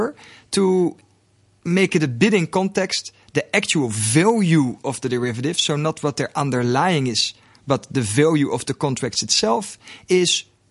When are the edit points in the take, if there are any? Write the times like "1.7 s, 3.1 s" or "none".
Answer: none